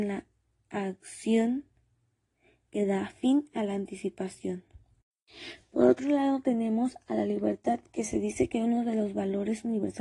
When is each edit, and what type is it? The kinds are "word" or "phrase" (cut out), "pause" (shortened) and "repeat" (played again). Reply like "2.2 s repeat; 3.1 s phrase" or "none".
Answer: none